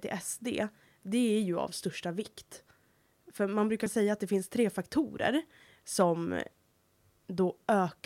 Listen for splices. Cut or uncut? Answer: uncut